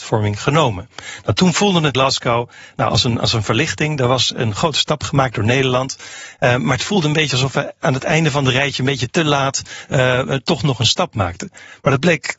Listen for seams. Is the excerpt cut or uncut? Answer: cut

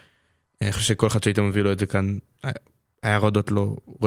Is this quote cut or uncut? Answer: uncut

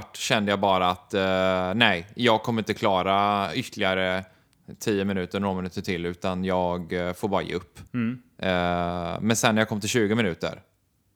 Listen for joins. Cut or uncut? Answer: cut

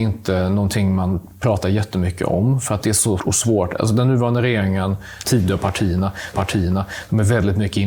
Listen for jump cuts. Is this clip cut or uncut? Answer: cut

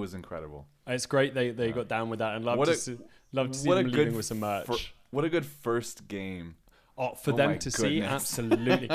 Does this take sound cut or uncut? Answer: uncut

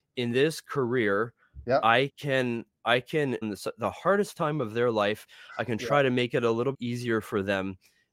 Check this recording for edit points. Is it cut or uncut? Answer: cut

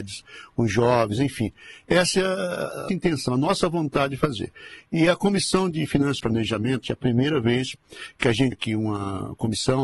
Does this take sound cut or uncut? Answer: cut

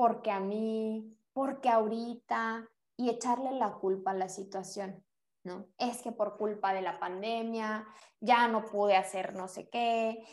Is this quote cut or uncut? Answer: uncut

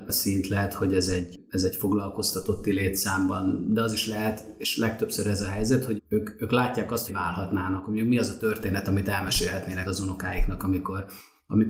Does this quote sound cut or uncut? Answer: cut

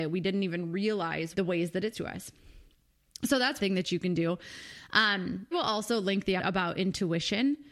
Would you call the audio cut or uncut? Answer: cut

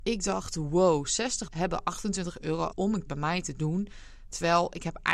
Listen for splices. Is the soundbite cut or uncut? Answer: cut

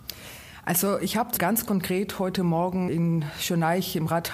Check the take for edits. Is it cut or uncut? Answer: cut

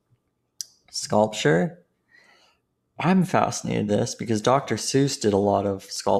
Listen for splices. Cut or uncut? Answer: cut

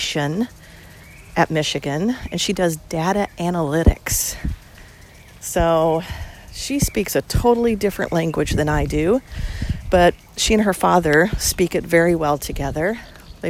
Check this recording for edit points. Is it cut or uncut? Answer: uncut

